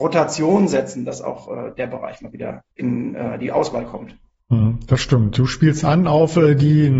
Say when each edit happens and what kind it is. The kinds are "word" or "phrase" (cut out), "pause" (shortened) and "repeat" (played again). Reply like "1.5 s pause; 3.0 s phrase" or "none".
2.7 s pause